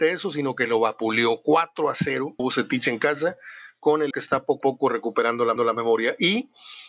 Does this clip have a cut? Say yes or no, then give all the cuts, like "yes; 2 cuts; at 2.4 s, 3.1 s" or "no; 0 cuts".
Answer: yes; 4 cuts; at 2.4 s, 4.1 s, 4.6 s, 5.6 s